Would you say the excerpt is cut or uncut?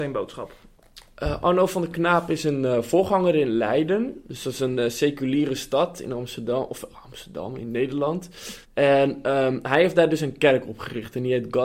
cut